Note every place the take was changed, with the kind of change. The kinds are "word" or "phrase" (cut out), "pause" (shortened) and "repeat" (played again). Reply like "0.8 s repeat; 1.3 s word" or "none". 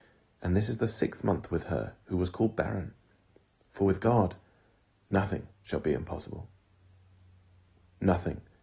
5.5 s pause

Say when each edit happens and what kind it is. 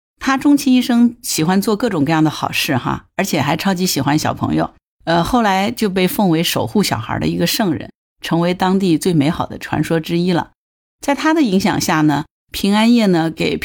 none

